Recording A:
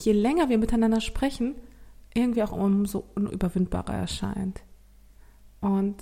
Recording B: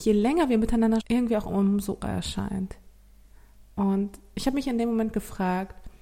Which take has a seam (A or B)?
B